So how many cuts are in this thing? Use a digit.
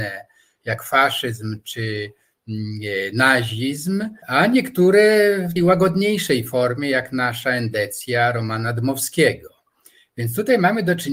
2